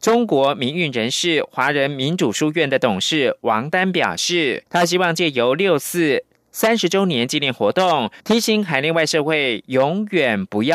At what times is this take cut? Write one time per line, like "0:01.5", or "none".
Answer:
0:04.7
0:08.2